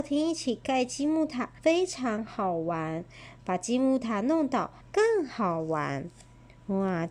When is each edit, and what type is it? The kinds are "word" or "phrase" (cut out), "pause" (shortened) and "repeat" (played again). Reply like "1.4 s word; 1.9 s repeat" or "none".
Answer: 1.6 s pause; 4.8 s pause

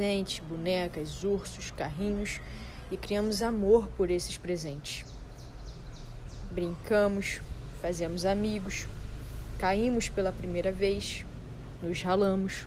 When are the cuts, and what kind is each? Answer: none

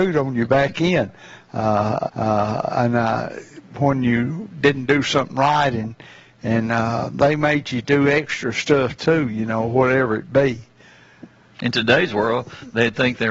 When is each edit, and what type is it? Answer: 2.1 s repeat

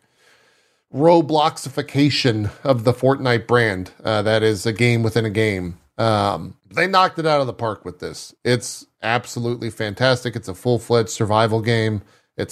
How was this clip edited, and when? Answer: 6.6 s pause

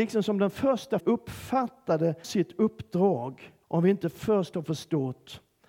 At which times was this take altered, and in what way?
1.0 s word; 2.2 s word; 3.6 s pause

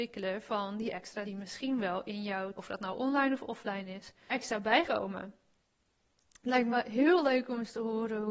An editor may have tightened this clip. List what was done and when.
1.2 s word; 2.6 s word; 4.3 s word; 4.8 s word; 6.7 s word

